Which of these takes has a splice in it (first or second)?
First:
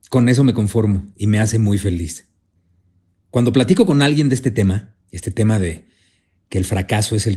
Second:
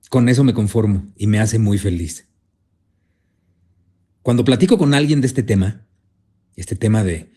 first